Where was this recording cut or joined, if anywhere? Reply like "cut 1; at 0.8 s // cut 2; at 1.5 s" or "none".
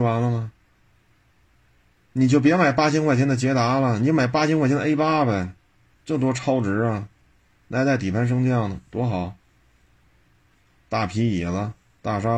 none